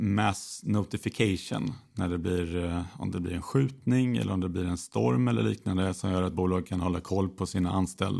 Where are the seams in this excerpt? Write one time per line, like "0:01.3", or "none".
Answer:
none